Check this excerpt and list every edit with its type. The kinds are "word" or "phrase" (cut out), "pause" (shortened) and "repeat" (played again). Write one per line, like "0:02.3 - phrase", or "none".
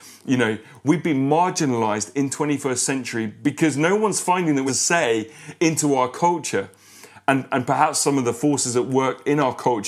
0:04.7 - phrase